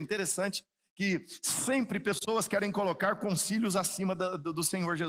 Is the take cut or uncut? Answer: uncut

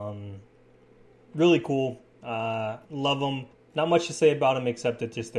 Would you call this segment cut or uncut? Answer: cut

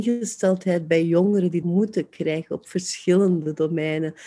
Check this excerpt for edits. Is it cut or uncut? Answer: cut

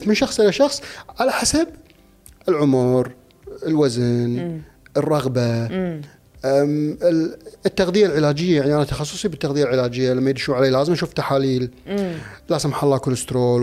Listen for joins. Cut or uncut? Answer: uncut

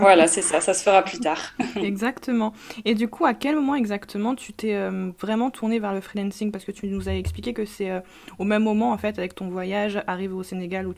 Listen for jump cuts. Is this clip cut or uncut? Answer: uncut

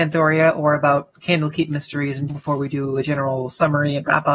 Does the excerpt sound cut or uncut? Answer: cut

